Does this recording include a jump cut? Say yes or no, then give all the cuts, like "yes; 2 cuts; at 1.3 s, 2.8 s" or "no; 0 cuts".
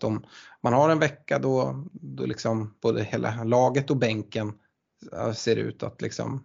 yes; 1 cut; at 2.8 s